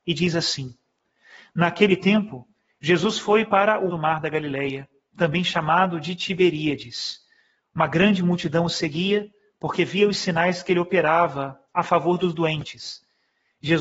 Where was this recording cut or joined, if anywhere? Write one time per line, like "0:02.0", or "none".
0:03.9